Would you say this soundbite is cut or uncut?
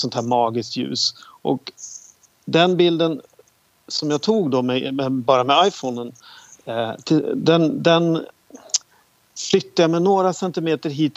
uncut